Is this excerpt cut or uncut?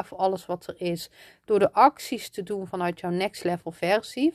uncut